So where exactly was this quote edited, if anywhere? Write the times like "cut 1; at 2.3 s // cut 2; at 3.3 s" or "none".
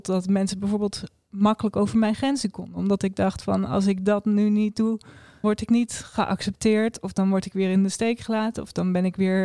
cut 1; at 5.4 s